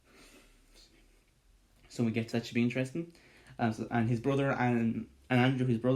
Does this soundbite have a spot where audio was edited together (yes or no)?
yes